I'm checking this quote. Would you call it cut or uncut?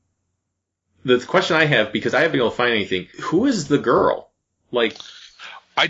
cut